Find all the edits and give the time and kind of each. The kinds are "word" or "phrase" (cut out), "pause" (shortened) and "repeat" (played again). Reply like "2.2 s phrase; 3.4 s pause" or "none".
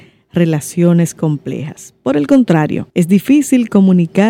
2.9 s pause